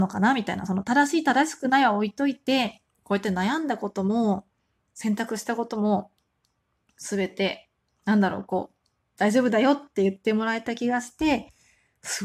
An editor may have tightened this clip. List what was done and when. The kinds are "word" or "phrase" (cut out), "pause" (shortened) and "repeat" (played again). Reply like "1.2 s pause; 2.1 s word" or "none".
none